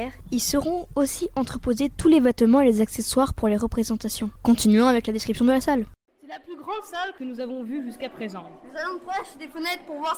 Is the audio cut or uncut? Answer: uncut